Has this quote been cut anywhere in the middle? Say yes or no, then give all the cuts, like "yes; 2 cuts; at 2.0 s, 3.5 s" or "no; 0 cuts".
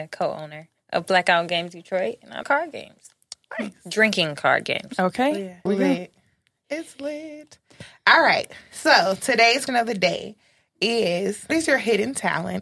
yes; 4 cuts; at 2.4 s, 5.7 s, 9.7 s, 11.5 s